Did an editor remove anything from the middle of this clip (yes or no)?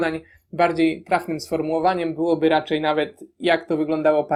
no